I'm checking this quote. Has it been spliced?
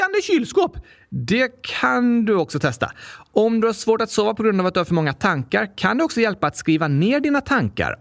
no; 0 cuts

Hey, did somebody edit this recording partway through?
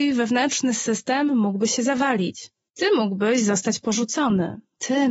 no; 0 cuts

